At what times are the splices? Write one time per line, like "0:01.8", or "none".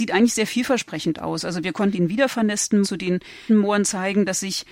0:01.9
0:02.8
0:03.5